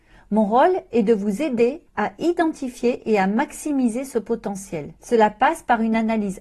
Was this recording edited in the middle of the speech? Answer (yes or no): yes